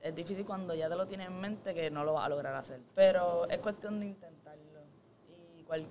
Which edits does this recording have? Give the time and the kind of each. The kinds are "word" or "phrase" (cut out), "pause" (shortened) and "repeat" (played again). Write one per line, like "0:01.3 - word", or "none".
0:02.9 - pause